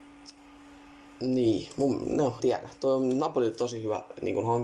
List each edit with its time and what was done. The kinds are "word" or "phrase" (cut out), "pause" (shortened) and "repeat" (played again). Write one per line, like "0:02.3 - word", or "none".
0:02.4 - word